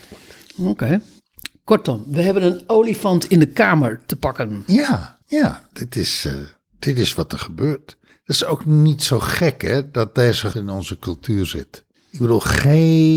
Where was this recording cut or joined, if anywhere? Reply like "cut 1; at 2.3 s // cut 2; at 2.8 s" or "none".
cut 1; at 5.2 s // cut 2; at 10.5 s